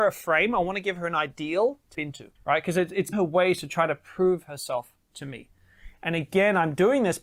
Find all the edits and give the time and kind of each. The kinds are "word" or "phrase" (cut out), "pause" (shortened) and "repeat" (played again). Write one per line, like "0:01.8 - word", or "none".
0:01.9 - word
0:02.4 - pause
0:03.1 - word
0:05.0 - pause